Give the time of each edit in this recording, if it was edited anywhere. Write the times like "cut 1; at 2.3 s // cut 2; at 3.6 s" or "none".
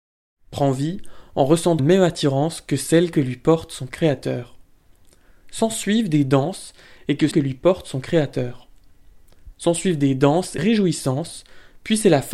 cut 1; at 1.8 s // cut 2; at 7.3 s // cut 3; at 10.6 s